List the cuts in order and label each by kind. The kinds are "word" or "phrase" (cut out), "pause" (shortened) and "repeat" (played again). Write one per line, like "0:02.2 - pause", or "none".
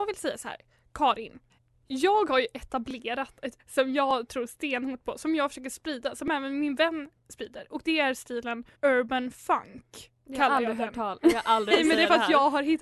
0:01.5 - pause
0:03.6 - word
0:07.2 - pause
0:08.7 - pause
0:11.7 - word